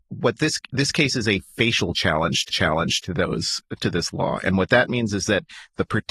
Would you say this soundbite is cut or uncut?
cut